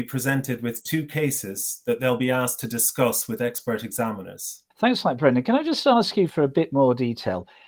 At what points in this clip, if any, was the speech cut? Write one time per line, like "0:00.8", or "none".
0:04.7
0:06.3